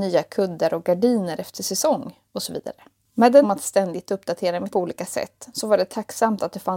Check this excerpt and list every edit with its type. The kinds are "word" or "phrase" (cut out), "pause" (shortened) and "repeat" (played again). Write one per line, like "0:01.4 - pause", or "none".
0:03.4 - word
0:04.7 - word

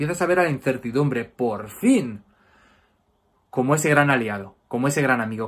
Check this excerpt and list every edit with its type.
none

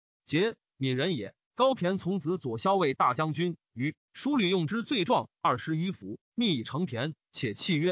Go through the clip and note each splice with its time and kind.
0:01.4 - pause

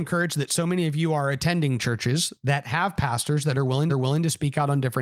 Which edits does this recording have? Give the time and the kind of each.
0:03.9 - repeat

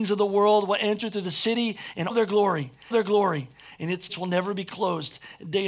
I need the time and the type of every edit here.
0:02.1 - word
0:02.9 - repeat
0:04.1 - word

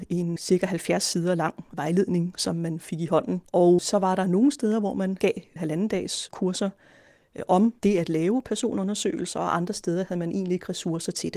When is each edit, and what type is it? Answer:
0:03.5 - pause
0:07.8 - pause

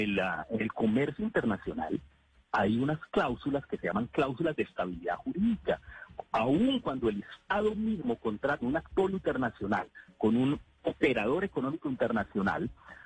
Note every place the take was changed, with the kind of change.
0:08.6 - word

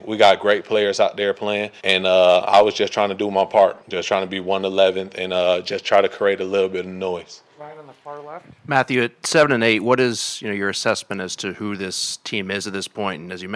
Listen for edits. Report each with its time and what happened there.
0:01.8 - pause
0:03.8 - pause
0:07.5 - pause

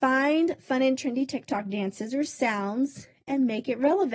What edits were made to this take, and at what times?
none

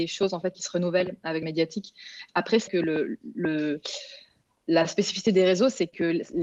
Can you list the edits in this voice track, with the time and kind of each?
0:01.4 - phrase
0:02.7 - word

